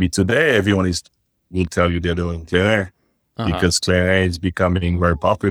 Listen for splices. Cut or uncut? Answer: uncut